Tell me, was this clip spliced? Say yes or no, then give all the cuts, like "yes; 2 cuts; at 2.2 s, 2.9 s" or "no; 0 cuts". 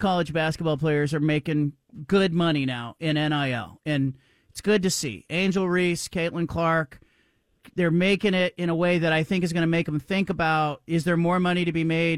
no; 0 cuts